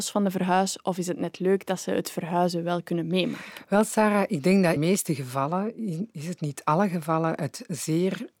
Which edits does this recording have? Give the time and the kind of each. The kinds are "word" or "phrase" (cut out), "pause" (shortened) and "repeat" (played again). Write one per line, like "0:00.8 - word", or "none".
0:04.8 - phrase